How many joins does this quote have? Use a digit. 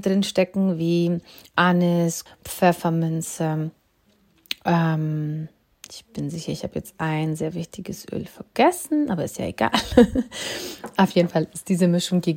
1